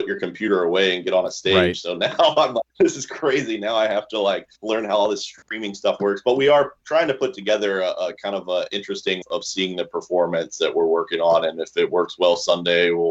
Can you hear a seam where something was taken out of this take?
yes; 3 cuts; at 2.7 s, 4.6 s, 9.2 s

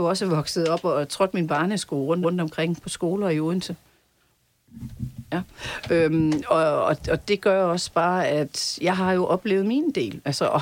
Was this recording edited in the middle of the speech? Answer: yes; 1 cut; at 2.2 s

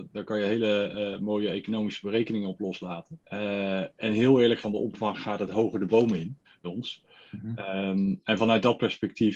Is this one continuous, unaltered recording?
no; 3 cuts; at 3.2 s, 4.6 s, 6.6 s

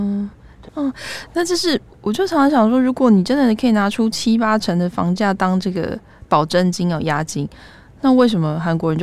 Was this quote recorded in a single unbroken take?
yes; 0 cuts

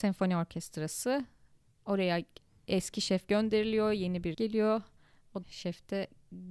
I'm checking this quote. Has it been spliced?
yes; 2 cuts; at 4.3 s, 5.4 s

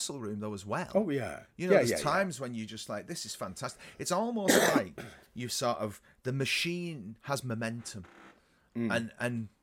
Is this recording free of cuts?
yes; 0 cuts

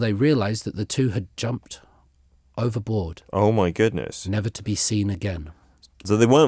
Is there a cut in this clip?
no; 0 cuts

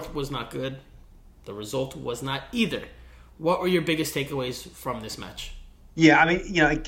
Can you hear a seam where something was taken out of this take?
no; 0 cuts

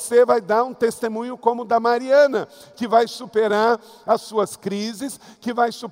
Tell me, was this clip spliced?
no; 0 cuts

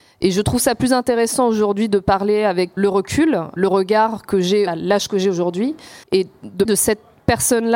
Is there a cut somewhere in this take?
yes; 5 cuts; at 2.8 s, 3.6 s, 4.7 s, 6.0 s, 6.6 s

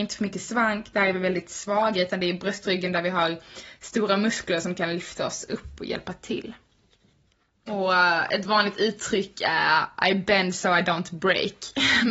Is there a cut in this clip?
no; 0 cuts

